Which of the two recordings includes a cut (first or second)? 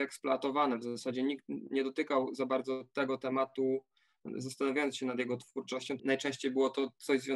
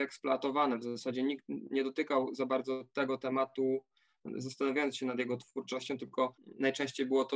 first